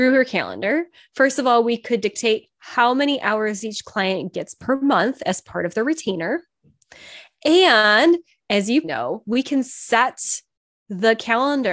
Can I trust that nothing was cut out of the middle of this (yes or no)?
no